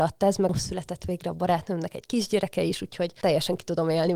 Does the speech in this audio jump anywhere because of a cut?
no; 0 cuts

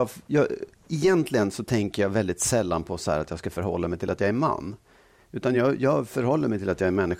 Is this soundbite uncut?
yes; 0 cuts

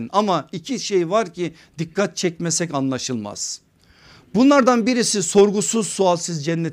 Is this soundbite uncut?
yes; 0 cuts

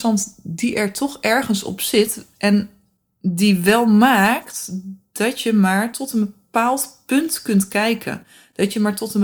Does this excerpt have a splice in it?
no; 0 cuts

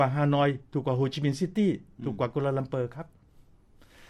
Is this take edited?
no; 0 cuts

